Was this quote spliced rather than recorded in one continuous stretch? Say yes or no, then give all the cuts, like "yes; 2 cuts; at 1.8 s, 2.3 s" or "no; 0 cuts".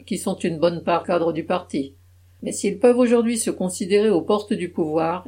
yes; 1 cut; at 1.0 s